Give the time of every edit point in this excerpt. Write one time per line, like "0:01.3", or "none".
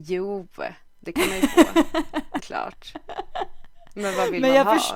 0:02.4